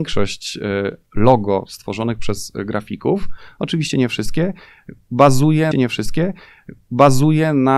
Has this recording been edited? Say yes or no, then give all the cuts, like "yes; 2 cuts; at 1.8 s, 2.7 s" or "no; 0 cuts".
yes; 1 cut; at 5.7 s